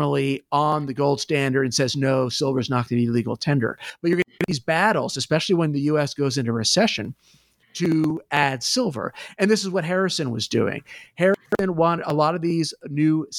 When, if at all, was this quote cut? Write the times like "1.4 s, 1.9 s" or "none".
none